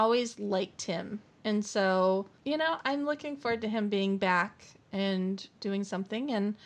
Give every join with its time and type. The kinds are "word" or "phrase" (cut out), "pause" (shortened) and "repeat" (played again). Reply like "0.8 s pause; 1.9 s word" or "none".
2.3 s pause; 5.6 s pause